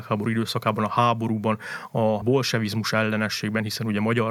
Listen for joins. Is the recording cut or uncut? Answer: uncut